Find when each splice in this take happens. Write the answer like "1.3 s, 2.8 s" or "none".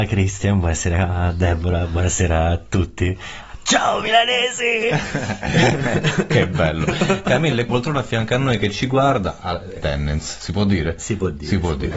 7.7 s, 9.8 s